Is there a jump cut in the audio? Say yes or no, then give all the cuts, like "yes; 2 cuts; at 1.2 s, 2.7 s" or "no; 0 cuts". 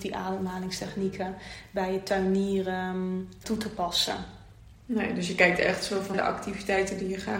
yes; 2 cuts; at 3.4 s, 6.1 s